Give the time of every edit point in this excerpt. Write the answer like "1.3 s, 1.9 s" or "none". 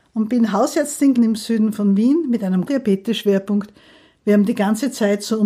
1.1 s, 2.7 s